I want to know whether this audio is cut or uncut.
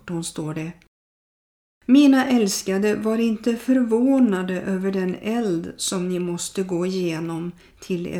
uncut